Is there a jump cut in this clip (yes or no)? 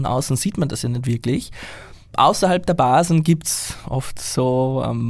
no